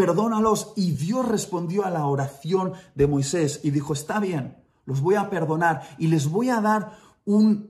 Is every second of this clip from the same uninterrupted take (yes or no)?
yes